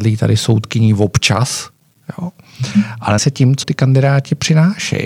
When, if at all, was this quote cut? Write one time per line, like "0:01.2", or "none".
0:03.2
0:03.6

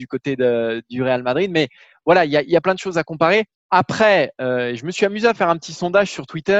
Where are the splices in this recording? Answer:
0:03.5

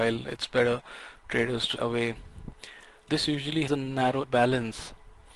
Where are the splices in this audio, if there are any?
0:01.2
0:01.8
0:03.1
0:03.7
0:04.2

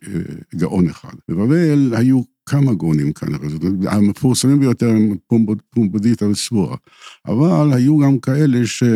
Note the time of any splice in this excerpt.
0:01.2

